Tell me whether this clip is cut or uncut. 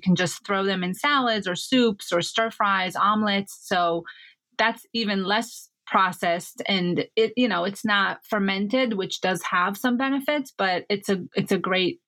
uncut